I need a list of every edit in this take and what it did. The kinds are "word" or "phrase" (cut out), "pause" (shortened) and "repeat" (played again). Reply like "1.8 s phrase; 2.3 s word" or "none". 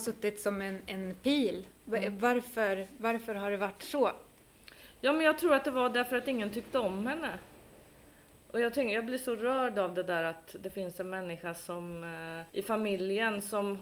12.5 s pause